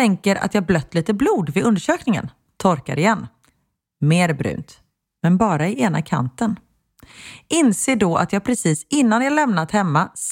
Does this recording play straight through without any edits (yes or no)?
yes